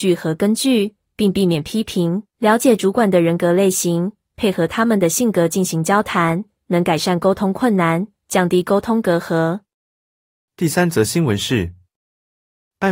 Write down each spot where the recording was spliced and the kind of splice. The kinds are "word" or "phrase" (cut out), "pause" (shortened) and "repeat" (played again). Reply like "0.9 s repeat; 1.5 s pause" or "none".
2.3 s pause